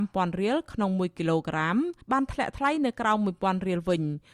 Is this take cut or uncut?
cut